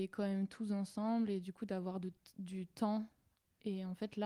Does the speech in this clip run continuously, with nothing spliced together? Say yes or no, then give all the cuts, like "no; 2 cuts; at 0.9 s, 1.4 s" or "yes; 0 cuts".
yes; 0 cuts